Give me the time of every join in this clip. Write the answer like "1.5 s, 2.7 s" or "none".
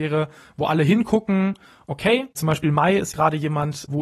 2.3 s, 3.1 s